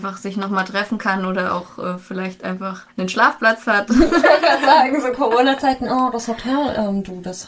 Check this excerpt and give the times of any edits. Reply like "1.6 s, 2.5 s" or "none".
2.9 s